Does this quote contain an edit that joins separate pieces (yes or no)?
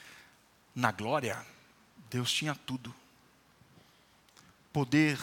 no